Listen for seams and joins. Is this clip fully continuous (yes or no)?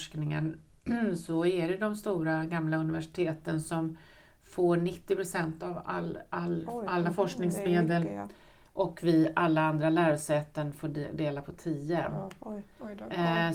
yes